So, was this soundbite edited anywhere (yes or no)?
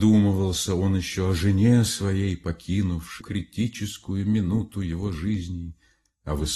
yes